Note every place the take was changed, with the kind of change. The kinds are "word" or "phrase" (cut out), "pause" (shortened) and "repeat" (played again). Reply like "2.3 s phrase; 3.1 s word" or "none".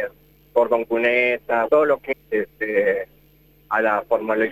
1.7 s word; 2.1 s word